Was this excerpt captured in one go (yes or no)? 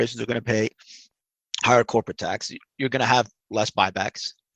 yes